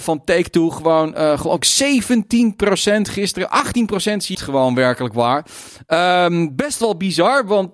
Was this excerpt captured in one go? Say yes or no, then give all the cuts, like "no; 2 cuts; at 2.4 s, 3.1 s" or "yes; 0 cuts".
no; 1 cut; at 4.3 s